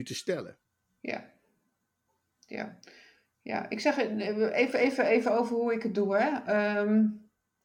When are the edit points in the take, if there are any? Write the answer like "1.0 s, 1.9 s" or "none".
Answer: none